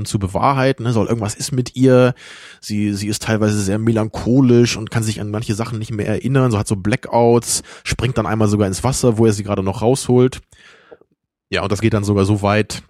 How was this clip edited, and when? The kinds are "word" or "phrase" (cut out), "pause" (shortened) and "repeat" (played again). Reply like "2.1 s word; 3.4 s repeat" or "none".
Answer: 11.8 s word